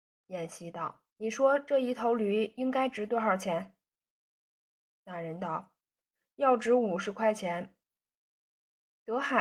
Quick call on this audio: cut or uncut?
cut